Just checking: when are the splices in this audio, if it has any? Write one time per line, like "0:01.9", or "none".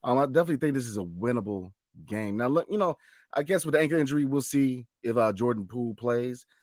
none